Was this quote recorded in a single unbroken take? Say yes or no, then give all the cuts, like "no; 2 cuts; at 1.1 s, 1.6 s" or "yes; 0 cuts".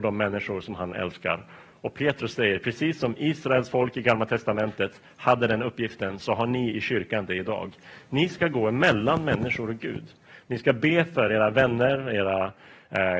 yes; 0 cuts